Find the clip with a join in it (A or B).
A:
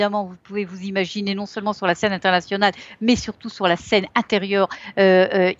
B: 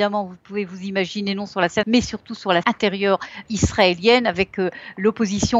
B